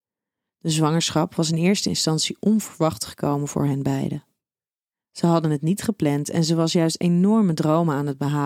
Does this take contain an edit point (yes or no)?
no